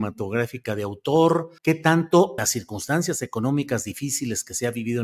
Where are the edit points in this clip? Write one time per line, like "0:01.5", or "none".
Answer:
0:01.6
0:02.4

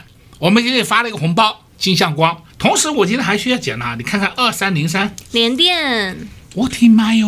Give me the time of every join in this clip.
0:01.7
0:02.5

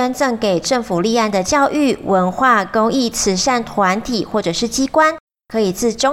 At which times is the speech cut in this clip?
none

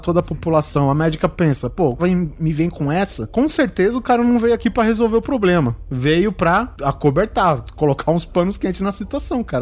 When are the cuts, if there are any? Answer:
0:02.0

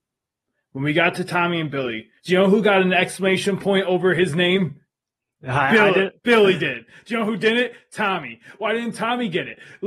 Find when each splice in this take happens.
0:02.2
0:06.2

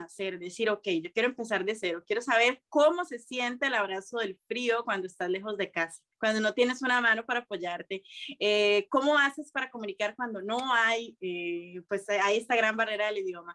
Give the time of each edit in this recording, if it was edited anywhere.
0:06.1

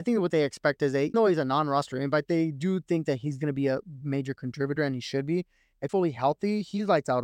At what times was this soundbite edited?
0:01.1
0:02.2
0:05.9

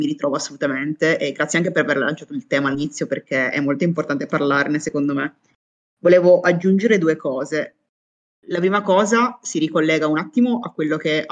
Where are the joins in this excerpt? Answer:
none

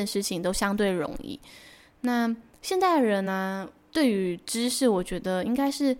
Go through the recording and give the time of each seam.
none

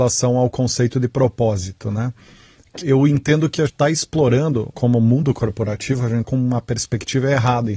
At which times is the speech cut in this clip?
0:02.8
0:03.7
0:04.7
0:06.2

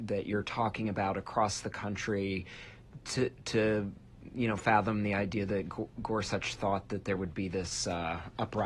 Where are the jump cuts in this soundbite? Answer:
none

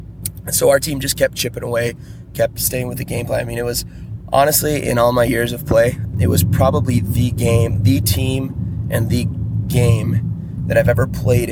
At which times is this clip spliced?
0:06.1

